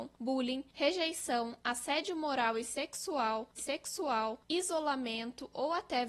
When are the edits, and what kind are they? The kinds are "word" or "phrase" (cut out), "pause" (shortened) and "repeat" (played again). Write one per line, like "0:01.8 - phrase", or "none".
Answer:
0:03.6 - repeat